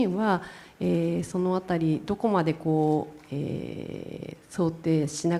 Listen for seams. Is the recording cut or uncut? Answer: uncut